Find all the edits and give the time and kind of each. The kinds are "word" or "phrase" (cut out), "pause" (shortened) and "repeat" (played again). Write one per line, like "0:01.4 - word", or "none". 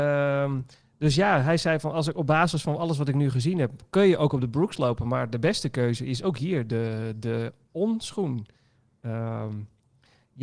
none